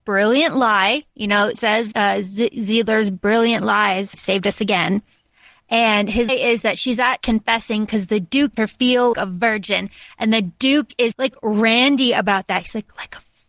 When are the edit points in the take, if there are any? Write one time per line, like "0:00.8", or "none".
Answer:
0:01.5
0:01.9
0:04.1
0:06.3
0:07.2
0:08.6
0:09.1
0:11.1